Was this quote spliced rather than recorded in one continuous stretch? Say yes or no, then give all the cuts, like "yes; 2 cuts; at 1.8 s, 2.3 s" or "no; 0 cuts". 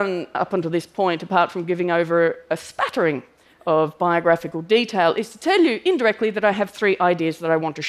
no; 0 cuts